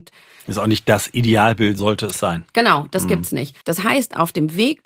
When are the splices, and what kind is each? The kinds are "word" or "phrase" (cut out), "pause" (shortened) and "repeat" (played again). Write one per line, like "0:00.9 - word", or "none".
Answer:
0:01.8 - word
0:03.6 - pause